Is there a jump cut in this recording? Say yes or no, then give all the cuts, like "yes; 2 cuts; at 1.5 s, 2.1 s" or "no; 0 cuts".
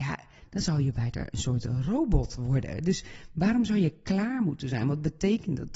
no; 0 cuts